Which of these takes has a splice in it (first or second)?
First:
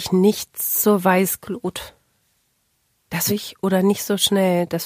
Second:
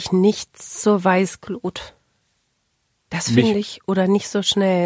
first